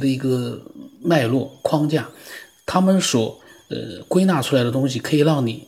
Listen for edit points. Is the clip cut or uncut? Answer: uncut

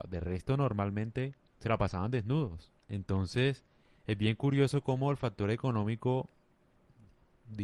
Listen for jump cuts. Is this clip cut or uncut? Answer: cut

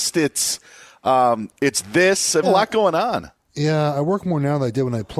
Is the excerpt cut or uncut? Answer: cut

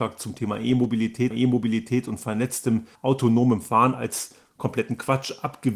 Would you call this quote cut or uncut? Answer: cut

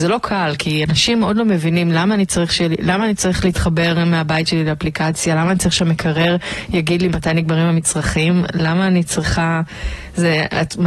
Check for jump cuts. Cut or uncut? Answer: uncut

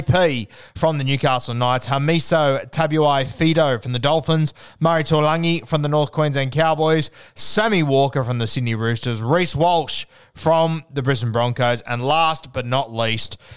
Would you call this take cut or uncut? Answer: uncut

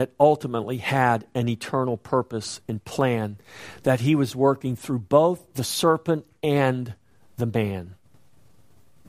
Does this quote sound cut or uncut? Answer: uncut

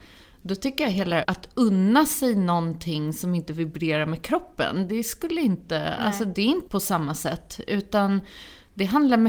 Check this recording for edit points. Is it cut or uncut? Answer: cut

